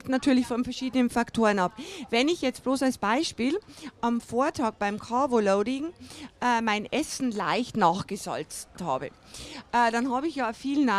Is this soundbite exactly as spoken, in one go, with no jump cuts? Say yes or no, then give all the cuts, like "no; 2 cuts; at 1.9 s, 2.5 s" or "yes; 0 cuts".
yes; 0 cuts